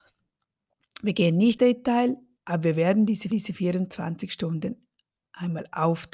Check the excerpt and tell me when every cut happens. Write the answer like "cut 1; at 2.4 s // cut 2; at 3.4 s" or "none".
cut 1; at 1.6 s // cut 2; at 3.3 s